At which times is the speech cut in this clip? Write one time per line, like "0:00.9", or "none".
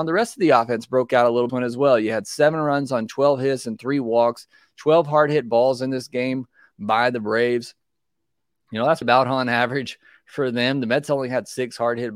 0:01.5
0:09.0